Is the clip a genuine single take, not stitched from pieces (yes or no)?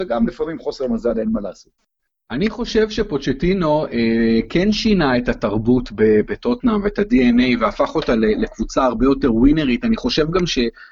yes